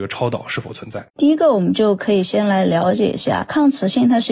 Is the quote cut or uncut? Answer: cut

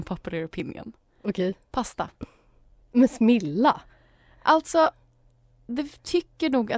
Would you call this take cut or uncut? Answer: uncut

